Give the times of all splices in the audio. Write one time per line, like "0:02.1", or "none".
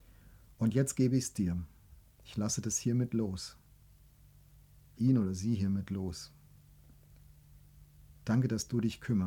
0:05.0